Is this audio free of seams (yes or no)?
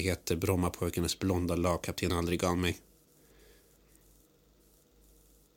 yes